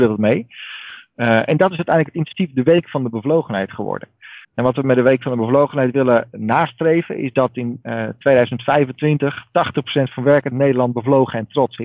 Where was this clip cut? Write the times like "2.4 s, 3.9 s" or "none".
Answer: 4.4 s